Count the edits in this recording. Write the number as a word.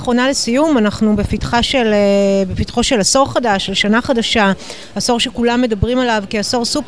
zero